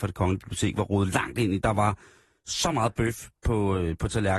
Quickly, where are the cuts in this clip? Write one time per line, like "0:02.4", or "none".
none